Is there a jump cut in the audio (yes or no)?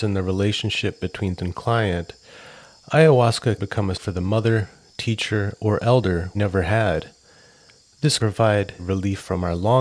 yes